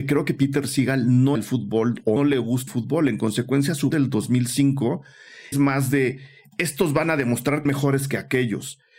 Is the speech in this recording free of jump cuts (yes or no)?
no